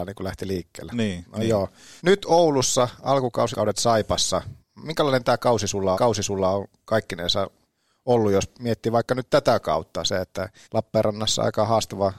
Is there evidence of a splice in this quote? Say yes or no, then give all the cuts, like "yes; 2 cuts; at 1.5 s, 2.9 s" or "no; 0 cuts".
yes; 5 cuts; at 2.0 s, 3.5 s, 4.6 s, 5.9 s, 10.6 s